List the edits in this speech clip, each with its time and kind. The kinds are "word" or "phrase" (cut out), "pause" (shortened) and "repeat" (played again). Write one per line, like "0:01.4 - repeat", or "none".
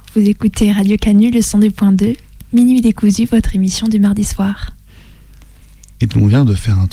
none